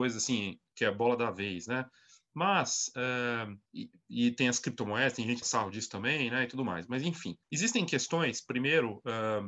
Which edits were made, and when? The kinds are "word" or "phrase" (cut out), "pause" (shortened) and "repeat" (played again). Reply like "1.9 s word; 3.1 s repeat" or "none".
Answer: 3.7 s pause; 5.4 s phrase; 7.4 s pause